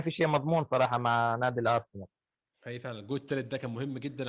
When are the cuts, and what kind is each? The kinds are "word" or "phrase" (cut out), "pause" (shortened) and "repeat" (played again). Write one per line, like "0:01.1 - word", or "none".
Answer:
none

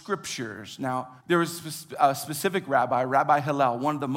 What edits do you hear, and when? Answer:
0:01.2 - pause

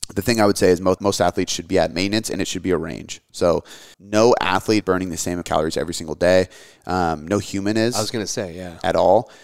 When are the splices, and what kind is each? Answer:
0:01.0 - word
0:03.9 - word
0:04.8 - word
0:05.4 - word

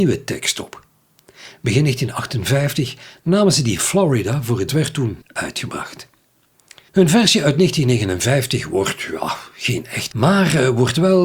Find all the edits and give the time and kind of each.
0:03.8 - phrase
0:04.7 - phrase
0:05.2 - word
0:10.1 - word

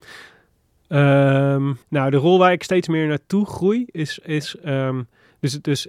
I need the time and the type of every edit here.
0:01.8 - pause

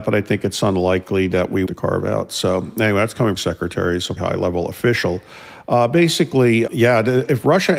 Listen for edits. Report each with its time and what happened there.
0:01.7 - phrase
0:03.4 - phrase
0:04.2 - word
0:06.7 - word

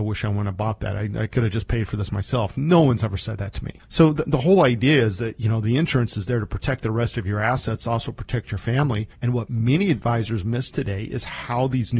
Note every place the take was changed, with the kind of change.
0:03.8 - pause
0:09.1 - pause

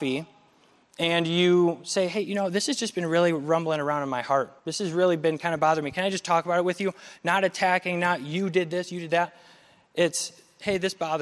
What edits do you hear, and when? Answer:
0:04.6 - pause

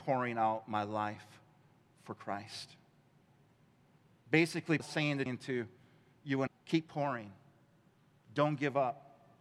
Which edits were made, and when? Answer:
0:04.8 - word
0:05.3 - word
0:06.5 - word

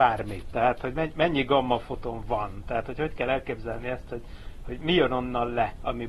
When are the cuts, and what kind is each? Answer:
none

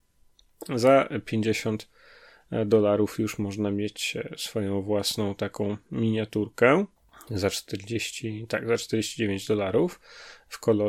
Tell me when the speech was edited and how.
0:07.0 - pause

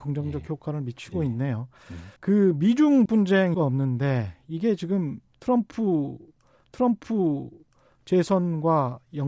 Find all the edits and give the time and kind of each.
0:02.2 - pause
0:03.1 - word
0:03.5 - phrase
0:06.6 - repeat

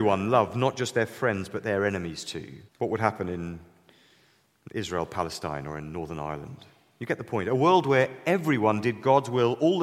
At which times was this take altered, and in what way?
0:02.7 - pause

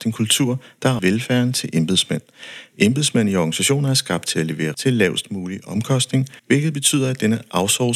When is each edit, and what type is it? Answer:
0:01.0 - word
0:04.7 - word
0:06.4 - pause

